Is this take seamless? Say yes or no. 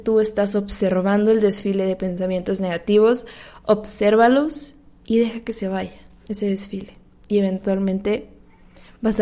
yes